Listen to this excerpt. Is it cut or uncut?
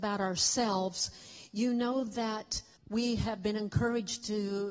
cut